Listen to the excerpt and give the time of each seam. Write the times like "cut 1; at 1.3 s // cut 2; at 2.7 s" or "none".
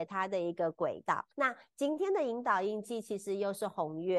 cut 1; at 1.3 s